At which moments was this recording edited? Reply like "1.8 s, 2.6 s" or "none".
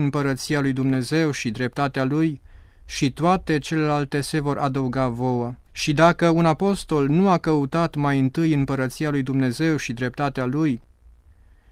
5.6 s